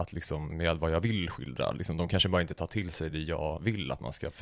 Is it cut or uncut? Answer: uncut